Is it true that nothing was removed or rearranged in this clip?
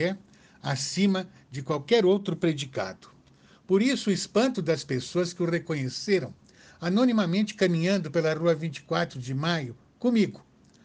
yes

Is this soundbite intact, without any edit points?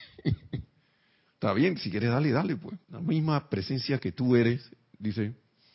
no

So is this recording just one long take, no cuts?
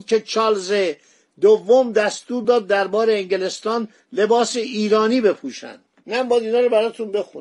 yes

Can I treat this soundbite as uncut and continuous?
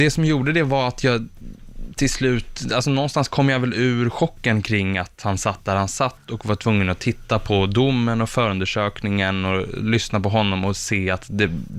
yes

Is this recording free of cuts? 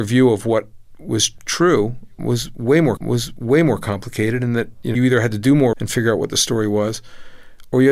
no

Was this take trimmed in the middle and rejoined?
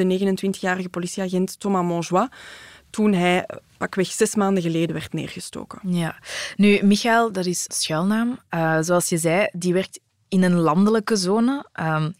yes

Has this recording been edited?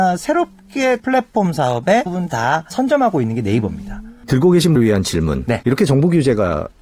yes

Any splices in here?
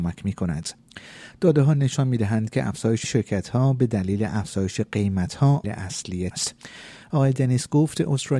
yes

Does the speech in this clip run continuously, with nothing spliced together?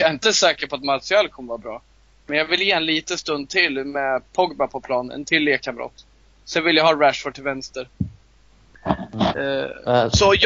yes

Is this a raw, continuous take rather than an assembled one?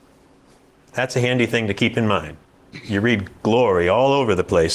yes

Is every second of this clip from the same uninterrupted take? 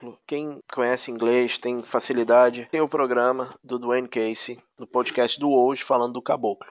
no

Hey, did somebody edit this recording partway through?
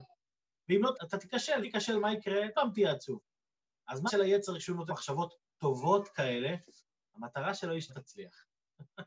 yes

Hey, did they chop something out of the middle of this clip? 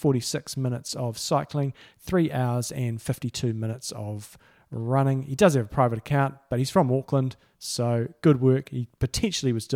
no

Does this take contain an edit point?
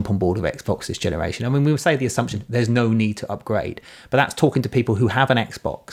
no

